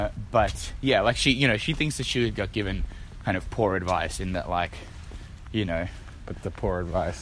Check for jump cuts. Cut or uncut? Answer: uncut